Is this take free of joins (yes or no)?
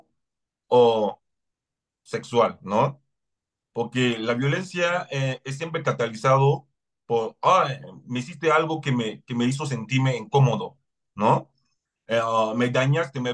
yes